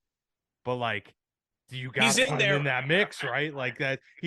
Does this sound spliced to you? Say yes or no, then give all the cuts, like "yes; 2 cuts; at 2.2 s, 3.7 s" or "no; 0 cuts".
no; 0 cuts